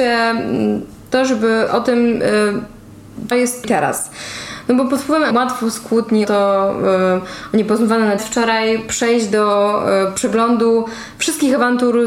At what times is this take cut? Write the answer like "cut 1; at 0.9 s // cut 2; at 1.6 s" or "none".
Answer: cut 1; at 1.7 s // cut 2; at 3.3 s // cut 3; at 3.6 s // cut 4; at 5.3 s // cut 5; at 6.2 s // cut 6; at 8.2 s